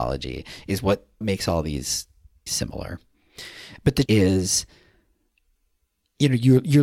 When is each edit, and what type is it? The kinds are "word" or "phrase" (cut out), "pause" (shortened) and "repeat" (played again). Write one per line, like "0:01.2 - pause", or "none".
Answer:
0:01.2 - word
0:02.5 - word
0:04.1 - word

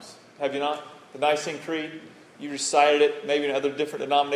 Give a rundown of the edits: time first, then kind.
none

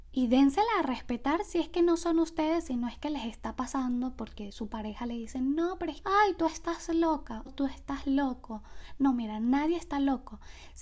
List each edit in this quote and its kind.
0:06.0 - word
0:07.5 - word

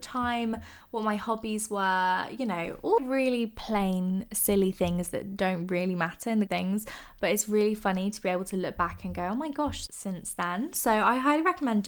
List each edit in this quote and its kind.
0:03.0 - word
0:06.5 - phrase
0:09.9 - phrase

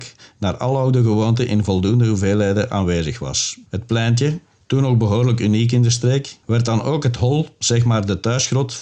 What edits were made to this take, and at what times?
0:03.7 - pause
0:04.6 - pause
0:06.4 - pause

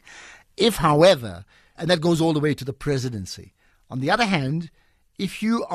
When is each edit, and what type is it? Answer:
0:01.8 - word

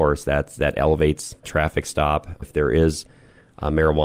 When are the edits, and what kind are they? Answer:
0:01.4 - word
0:02.4 - word

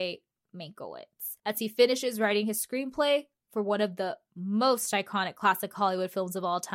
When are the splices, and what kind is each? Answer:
0:01.4 - pause

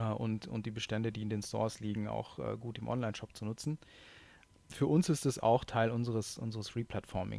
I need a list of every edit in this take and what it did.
none

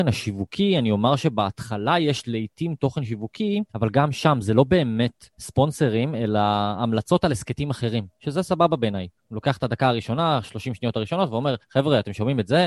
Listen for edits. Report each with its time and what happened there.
0:03.7 - pause
0:05.3 - pause
0:09.2 - pause
0:11.6 - pause

